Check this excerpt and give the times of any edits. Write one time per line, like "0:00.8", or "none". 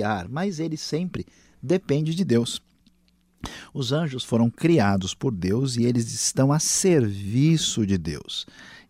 none